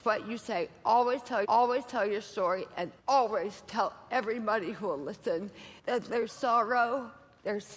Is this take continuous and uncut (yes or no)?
no